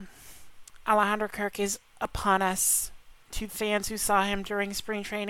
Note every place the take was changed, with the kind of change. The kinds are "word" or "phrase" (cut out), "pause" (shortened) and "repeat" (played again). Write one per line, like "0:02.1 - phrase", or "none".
0:03.5 - word